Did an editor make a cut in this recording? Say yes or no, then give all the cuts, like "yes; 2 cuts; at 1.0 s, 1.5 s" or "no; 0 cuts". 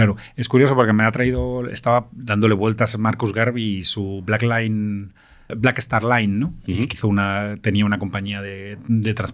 yes; 2 cuts; at 5.5 s, 6.9 s